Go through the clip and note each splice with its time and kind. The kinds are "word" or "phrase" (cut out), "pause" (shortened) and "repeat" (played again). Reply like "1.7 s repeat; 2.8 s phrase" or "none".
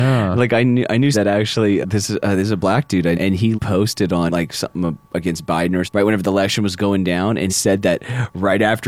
1.1 s word; 1.8 s word; 3.1 s word; 3.5 s word; 4.3 s word; 5.1 s word; 5.8 s word; 7.5 s word